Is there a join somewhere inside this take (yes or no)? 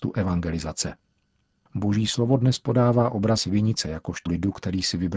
yes